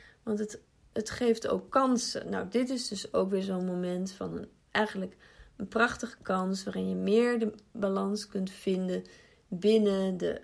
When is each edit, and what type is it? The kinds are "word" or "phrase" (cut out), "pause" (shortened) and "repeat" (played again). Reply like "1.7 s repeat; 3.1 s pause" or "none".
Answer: none